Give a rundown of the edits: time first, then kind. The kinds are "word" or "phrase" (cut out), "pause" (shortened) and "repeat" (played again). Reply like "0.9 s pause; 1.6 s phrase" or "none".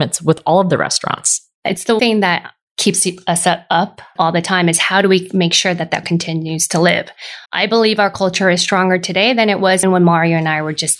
2.0 s word; 4.2 s word; 6.0 s word; 7.5 s pause; 9.8 s word

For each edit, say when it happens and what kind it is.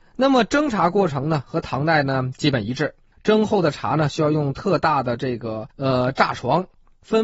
3.1 s pause; 5.7 s pause

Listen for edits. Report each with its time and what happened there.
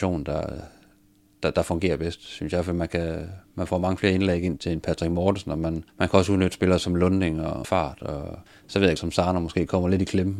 4.6 s word; 5.9 s pause; 7.6 s phrase; 8.5 s pause; 9.0 s phrase

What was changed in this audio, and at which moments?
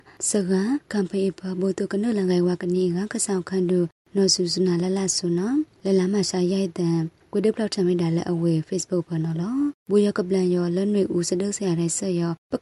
none

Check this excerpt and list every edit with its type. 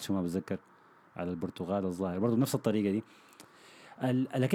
none

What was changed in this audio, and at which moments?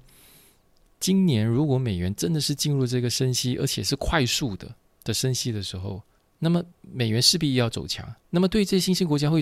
6.2 s pause; 6.7 s pause; 8.2 s pause

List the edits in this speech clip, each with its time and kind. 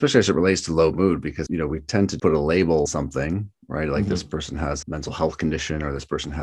1.5 s word; 2.2 s word; 2.9 s word; 4.8 s word

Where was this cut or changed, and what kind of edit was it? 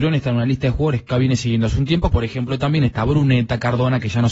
1.1 s word; 2.1 s word

